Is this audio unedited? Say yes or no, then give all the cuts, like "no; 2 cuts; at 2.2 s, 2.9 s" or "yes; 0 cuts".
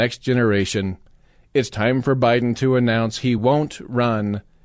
yes; 0 cuts